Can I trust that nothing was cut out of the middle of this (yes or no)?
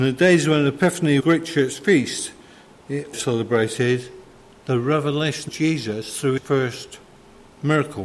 no